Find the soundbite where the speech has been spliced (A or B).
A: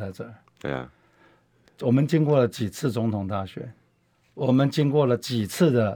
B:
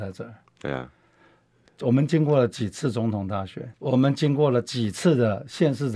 B